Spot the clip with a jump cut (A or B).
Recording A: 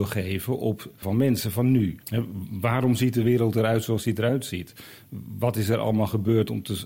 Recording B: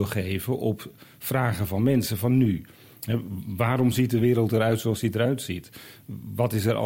A